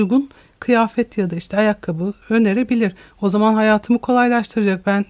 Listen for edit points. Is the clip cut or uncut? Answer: cut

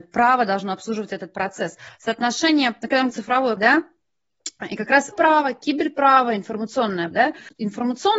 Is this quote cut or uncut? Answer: cut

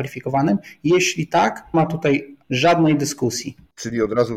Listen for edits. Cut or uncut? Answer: cut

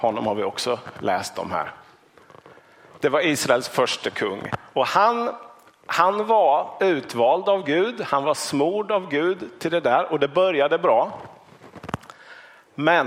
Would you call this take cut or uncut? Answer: uncut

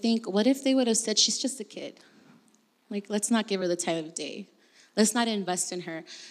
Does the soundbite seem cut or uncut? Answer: uncut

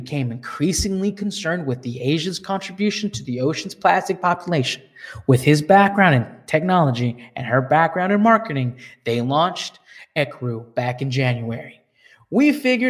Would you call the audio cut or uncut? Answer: uncut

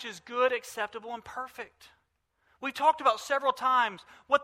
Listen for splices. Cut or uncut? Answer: uncut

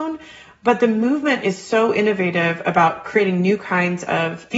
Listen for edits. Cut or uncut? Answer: uncut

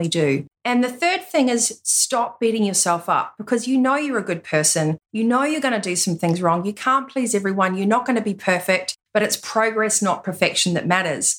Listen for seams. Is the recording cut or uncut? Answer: uncut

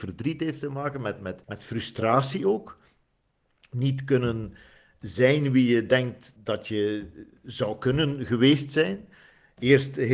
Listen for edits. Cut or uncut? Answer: cut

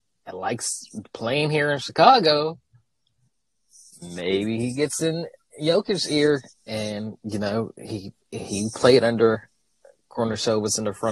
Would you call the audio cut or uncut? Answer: uncut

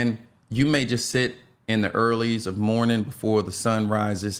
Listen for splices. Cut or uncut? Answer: uncut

